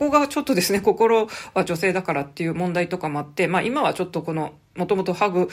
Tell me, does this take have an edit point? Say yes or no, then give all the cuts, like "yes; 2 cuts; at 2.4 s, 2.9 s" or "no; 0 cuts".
no; 0 cuts